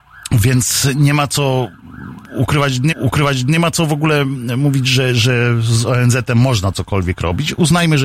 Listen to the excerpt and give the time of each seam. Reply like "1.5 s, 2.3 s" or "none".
2.9 s